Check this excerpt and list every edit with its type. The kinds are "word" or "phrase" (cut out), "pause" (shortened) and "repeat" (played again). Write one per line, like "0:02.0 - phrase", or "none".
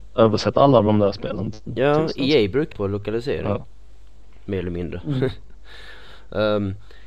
0:02.7 - phrase